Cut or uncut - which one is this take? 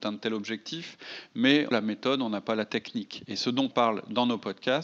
cut